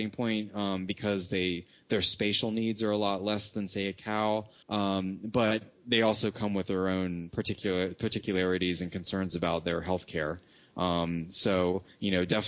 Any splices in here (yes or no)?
yes